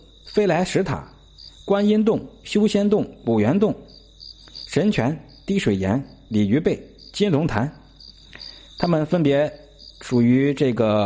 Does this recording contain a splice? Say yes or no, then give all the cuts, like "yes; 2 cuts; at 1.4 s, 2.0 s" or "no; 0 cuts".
no; 0 cuts